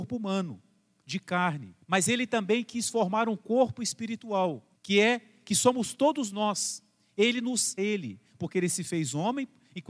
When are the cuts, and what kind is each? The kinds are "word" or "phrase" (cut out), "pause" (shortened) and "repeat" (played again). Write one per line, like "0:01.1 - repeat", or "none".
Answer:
0:01.8 - pause
0:04.7 - pause
0:07.8 - phrase